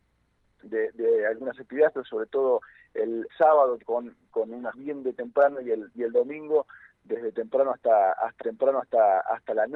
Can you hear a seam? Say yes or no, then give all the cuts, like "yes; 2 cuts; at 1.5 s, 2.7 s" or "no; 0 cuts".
yes; 4 cuts; at 3.3 s, 3.8 s, 4.7 s, 8.4 s